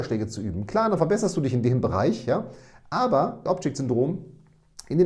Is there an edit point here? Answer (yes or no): yes